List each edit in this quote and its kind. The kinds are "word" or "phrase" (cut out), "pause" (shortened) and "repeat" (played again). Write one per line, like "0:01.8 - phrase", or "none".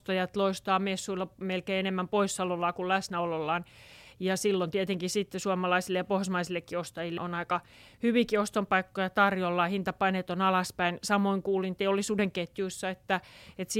0:07.2 - word